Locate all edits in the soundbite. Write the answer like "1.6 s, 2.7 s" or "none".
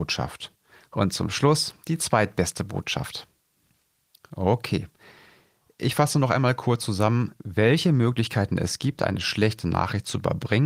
none